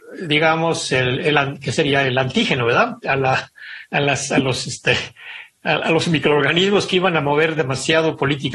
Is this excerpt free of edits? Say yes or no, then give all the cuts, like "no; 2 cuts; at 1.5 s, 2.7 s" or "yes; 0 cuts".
yes; 0 cuts